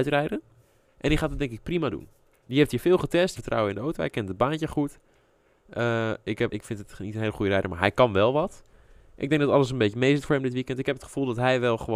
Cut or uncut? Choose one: cut